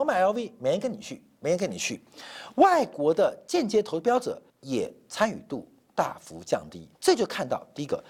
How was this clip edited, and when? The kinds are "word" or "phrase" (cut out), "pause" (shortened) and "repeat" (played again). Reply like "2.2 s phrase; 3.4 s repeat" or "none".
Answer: 4.5 s pause; 6.9 s pause